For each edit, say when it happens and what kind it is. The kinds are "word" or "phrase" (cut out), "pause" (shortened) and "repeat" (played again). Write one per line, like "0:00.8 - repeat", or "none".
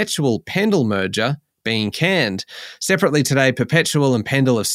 none